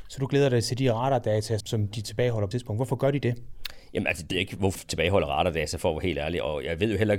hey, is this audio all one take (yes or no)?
no